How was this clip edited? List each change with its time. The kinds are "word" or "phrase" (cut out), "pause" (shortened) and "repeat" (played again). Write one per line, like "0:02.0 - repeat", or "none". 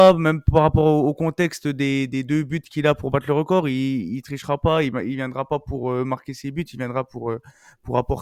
none